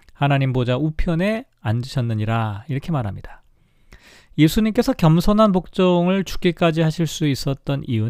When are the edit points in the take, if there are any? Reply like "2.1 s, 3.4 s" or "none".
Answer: none